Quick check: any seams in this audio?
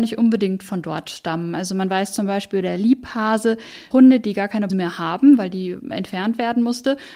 yes; 2 cuts; at 3.9 s, 4.7 s

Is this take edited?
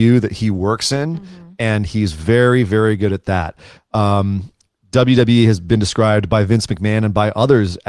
no; 0 cuts

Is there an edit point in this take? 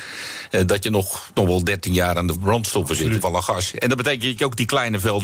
yes; 3 cuts; at 1.3 s, 2.3 s, 3.2 s

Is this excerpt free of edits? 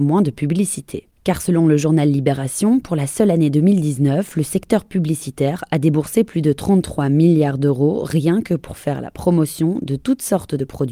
yes; 0 cuts

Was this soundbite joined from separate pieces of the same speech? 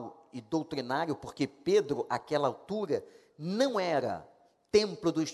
no; 0 cuts

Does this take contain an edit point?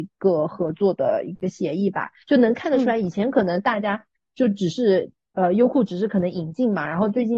no; 0 cuts

